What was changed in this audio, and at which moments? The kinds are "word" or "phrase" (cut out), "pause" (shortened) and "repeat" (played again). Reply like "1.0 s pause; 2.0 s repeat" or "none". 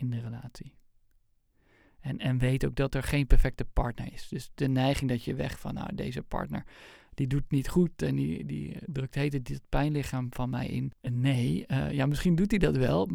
11.0 s pause